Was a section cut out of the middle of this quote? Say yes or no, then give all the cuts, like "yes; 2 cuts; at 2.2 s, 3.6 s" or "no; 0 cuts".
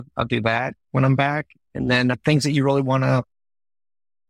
no; 0 cuts